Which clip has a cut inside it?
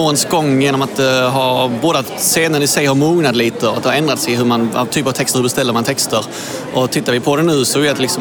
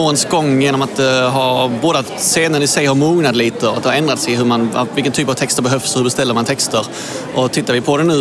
first; 2 cuts; at 4.9 s, 5.3 s

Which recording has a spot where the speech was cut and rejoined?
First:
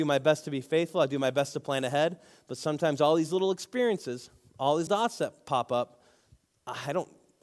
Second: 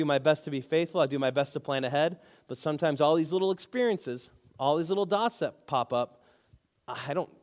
first; 1 cut; at 4.9 s

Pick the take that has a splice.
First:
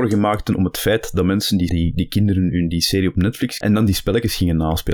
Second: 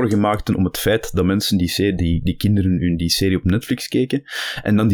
first; 2 cuts; at 1.7 s, 3.6 s

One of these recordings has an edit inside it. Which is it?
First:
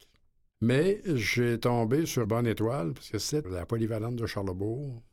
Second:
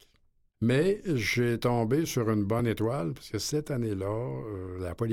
first; 2 cuts; at 2.2 s, 3.4 s

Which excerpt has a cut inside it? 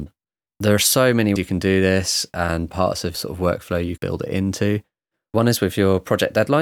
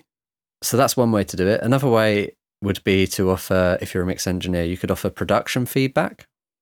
first; 4 cuts; at 1.4 s, 2.7 s, 3.1 s, 4.0 s

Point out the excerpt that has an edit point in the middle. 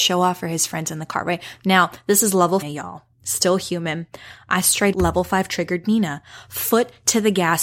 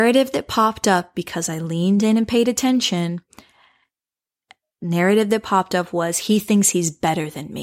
first; 2 cuts; at 2.6 s, 4.9 s

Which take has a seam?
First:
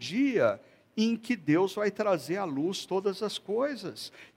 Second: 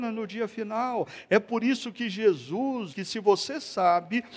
second; 1 cut; at 2.9 s

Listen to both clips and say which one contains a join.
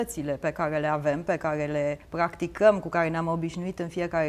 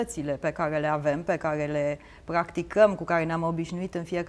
first; 1 cut; at 2.0 s

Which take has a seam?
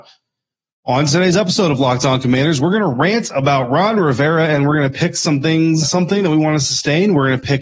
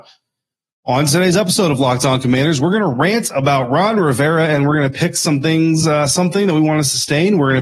first; 1 cut; at 5.8 s

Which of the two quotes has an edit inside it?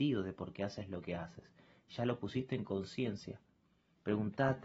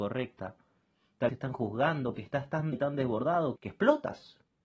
second; 4 cuts; at 1.3 s, 2.1 s, 2.7 s, 3.6 s

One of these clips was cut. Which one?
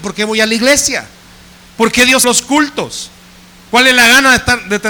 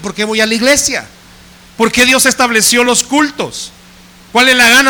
first; 1 cut; at 2.2 s

